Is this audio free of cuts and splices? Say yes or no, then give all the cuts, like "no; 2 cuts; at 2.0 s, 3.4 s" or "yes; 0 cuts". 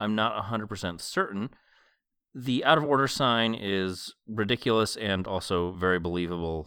yes; 0 cuts